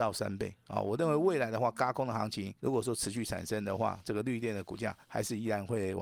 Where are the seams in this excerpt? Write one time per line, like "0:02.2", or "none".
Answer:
0:02.6
0:05.0